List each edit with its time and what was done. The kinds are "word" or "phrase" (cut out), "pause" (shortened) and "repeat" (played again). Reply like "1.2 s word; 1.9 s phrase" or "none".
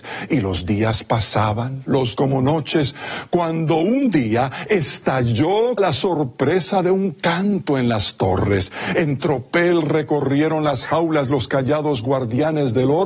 2.2 s phrase; 5.8 s phrase